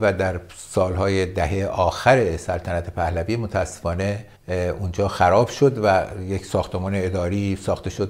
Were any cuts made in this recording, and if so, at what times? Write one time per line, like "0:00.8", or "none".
0:04.4